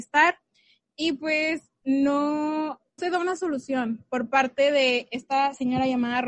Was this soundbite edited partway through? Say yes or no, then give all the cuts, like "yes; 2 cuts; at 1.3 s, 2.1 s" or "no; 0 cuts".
yes; 1 cut; at 3.0 s